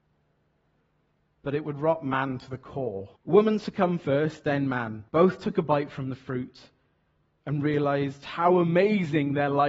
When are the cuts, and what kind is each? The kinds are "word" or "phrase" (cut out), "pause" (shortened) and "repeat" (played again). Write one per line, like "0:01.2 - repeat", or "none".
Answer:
0:03.2 - pause
0:05.1 - pause